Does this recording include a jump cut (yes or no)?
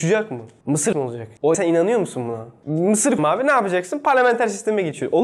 yes